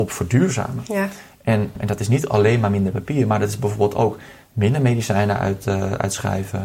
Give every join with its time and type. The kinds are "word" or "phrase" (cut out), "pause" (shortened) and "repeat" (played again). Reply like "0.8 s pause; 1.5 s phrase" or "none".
none

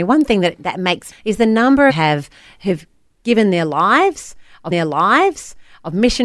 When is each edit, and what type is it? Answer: 1.1 s phrase; 1.9 s phrase; 4.7 s repeat

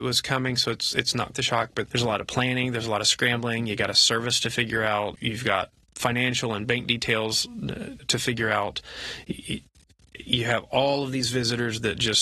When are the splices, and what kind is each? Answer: 1.3 s word; 1.9 s word; 5.1 s word; 5.9 s word; 8.0 s word

